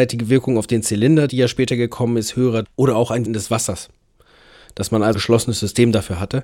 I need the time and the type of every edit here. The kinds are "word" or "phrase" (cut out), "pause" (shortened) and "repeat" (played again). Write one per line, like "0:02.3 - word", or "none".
0:01.3 - word
0:02.6 - word
0:03.3 - word
0:05.1 - word